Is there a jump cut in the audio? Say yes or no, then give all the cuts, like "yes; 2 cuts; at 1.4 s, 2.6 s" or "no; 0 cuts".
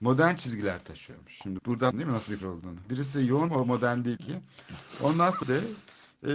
yes; 6 cuts; at 1.6 s, 1.9 s, 2.4 s, 3.5 s, 4.2 s, 5.4 s